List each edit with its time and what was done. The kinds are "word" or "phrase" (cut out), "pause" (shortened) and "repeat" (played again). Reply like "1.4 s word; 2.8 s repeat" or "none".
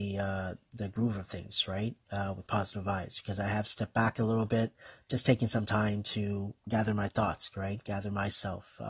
6.6 s pause

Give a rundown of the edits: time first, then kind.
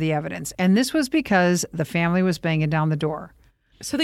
none

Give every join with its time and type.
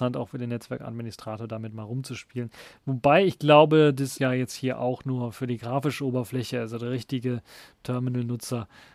4.2 s word

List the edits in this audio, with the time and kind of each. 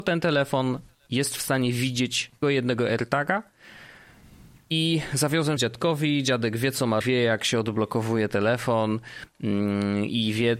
2.4 s word; 5.6 s word; 7.0 s word

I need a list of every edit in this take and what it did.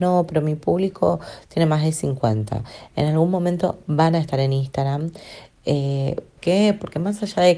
6.4 s word

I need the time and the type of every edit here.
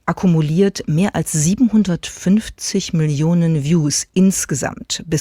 none

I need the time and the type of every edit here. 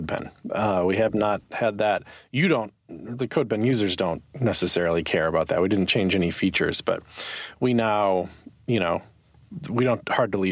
none

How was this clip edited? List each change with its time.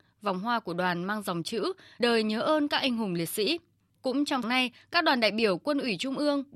2.0 s word; 4.4 s word

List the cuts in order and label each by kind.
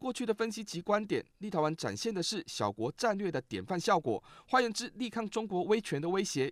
none

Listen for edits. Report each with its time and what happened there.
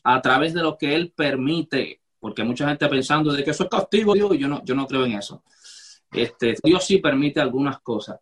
4.1 s word; 6.6 s word

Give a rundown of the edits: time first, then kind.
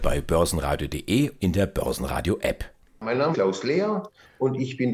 1.4 s word; 3.3 s word

